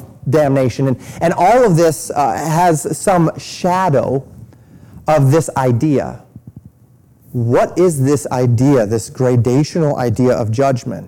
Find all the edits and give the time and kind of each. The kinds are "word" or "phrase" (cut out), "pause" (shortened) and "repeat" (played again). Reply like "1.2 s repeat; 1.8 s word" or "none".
none